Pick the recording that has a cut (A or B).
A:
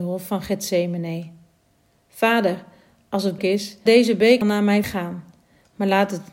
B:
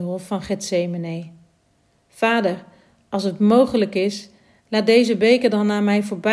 A